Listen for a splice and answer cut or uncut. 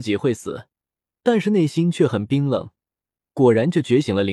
uncut